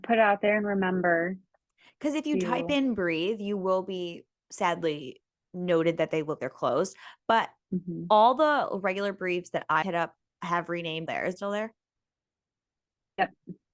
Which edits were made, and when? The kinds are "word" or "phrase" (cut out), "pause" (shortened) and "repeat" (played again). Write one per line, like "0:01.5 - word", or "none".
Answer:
0:06.4 - word
0:09.8 - word
0:11.1 - phrase
0:11.4 - phrase